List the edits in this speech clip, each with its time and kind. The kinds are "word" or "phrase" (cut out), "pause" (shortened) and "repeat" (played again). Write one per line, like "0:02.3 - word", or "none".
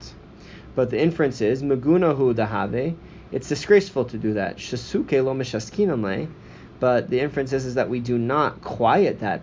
none